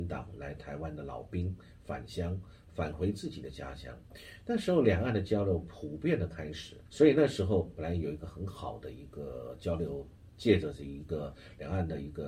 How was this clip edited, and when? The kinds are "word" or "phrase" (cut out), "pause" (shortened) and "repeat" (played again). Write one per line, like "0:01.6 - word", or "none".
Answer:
0:06.9 - pause